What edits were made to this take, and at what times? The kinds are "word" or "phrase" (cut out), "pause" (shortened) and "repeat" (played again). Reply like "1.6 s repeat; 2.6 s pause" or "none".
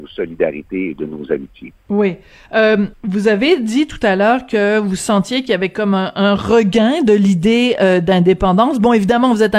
1.8 s pause; 2.9 s pause